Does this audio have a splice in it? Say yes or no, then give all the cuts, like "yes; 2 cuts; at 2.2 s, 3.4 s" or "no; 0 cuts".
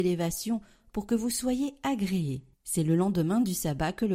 yes; 1 cut; at 2.5 s